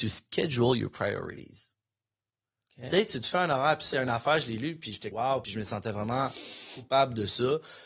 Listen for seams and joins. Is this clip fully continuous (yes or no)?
no